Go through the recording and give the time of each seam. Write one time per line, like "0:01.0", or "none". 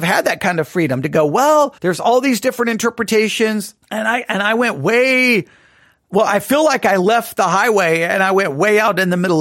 0:01.8
0:03.8